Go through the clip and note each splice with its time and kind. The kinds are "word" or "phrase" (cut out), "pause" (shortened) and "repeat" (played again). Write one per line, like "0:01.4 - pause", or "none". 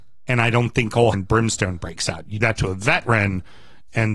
0:01.1 - word
0:02.4 - word